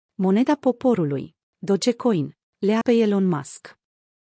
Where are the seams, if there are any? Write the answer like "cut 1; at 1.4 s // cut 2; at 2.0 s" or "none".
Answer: cut 1; at 2.8 s